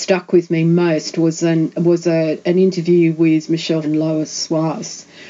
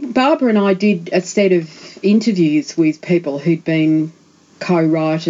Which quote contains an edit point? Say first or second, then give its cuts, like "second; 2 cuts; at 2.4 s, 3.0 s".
first; 1 cut; at 3.8 s